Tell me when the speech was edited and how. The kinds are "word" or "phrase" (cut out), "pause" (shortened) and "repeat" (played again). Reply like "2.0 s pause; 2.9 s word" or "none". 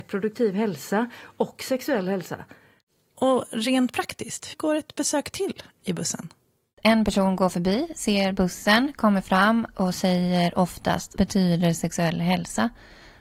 4.5 s word; 11.2 s word